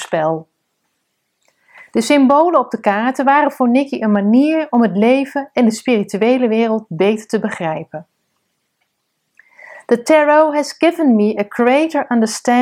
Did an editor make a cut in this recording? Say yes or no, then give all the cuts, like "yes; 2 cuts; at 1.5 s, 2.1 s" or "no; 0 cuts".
no; 0 cuts